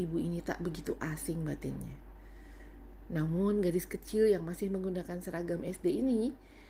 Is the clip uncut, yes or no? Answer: yes